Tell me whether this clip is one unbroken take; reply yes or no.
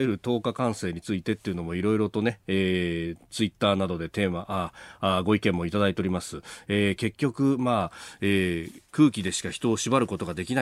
no